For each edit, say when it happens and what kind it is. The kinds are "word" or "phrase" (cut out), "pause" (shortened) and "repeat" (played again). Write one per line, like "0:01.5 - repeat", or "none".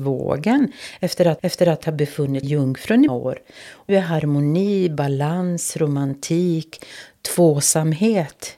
0:01.4 - repeat
0:02.4 - word
0:03.1 - word
0:03.9 - word